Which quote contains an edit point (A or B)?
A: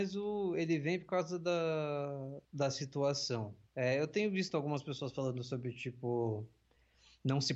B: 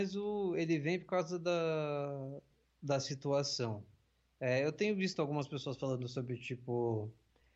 A